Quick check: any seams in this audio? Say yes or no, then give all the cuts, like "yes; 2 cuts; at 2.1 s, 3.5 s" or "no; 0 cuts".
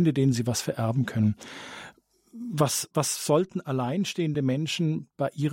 no; 0 cuts